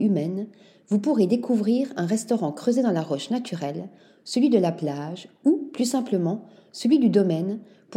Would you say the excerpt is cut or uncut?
uncut